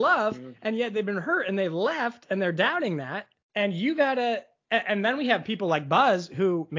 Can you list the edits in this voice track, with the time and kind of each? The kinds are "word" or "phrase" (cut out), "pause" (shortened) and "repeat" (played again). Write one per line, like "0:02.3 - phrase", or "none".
0:03.4 - pause